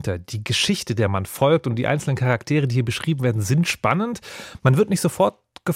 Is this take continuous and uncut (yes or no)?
yes